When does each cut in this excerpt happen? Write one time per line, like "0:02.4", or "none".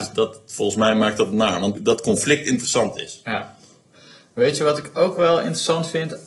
0:01.7

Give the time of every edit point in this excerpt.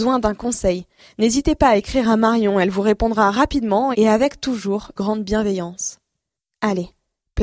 0:05.0

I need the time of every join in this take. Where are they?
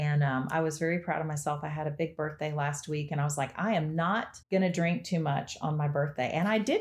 0:04.4

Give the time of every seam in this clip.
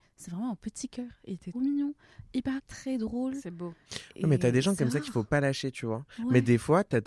0:01.5
0:02.6

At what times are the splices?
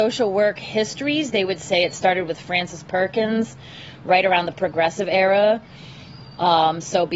none

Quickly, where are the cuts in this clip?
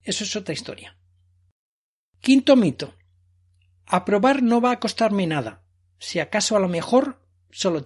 none

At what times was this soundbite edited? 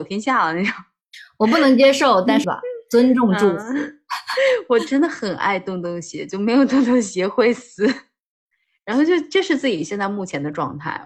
0:02.4

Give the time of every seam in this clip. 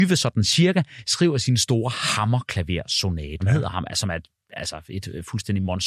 0:03.4

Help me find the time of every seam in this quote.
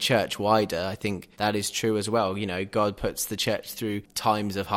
0:01.3

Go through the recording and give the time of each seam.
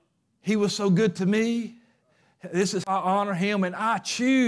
0:02.8

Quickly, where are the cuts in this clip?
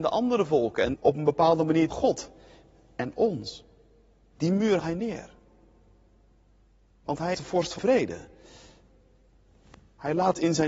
0:00.9
0:01.9
0:04.8
0:07.3
0:07.8

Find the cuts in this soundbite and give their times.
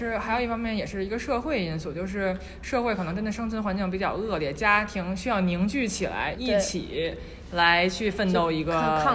0:06.3

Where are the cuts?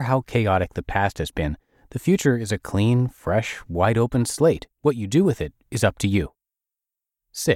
0:04.7

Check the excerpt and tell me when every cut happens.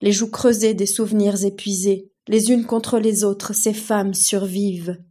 0:02.2

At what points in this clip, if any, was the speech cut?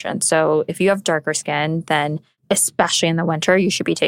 none

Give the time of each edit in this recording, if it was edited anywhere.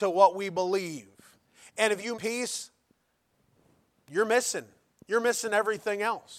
0:02.2

